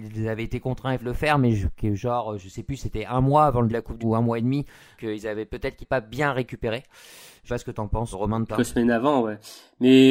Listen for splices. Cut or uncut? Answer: cut